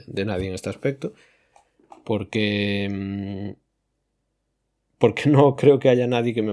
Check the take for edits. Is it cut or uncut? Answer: uncut